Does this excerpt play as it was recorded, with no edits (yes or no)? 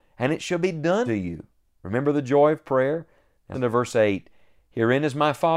no